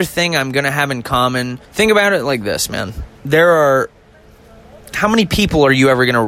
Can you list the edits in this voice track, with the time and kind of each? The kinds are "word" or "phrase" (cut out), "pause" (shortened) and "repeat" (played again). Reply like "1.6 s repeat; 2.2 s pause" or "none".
1.6 s pause; 3.1 s pause